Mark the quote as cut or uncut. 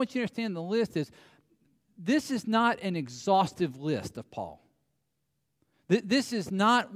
uncut